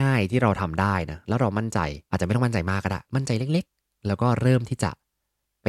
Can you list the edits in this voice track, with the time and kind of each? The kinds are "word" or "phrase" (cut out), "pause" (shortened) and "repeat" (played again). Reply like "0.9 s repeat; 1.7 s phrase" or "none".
2.1 s pause; 3.0 s pause